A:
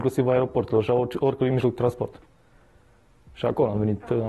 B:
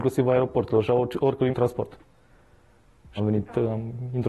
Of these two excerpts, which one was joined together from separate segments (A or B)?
B